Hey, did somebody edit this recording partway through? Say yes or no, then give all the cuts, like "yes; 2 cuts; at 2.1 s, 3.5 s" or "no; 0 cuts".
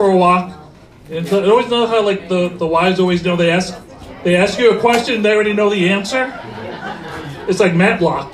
no; 0 cuts